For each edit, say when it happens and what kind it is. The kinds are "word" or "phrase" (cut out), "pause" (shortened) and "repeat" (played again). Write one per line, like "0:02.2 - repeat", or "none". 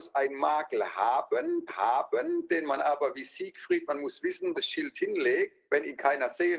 0:01.7 - repeat
0:04.5 - phrase
0:05.6 - pause